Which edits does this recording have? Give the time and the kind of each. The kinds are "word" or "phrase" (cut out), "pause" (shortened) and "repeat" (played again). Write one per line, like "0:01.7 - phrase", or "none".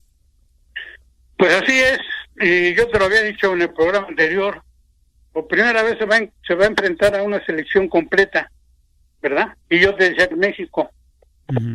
0:09.6 - pause
0:10.3 - phrase